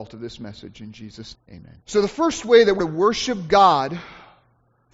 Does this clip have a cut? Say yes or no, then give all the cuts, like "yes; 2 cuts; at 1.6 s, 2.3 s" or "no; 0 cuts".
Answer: yes; 3 cuts; at 1.3 s, 1.8 s, 2.8 s